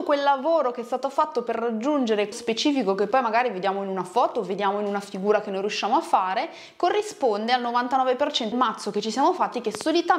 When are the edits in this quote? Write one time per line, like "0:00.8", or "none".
0:02.3
0:08.5